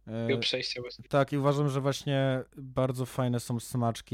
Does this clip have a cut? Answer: yes; 1 cut; at 2.5 s

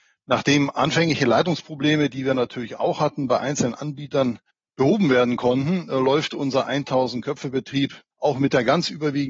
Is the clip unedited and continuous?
no; 2 cuts; at 4.5 s, 8.1 s

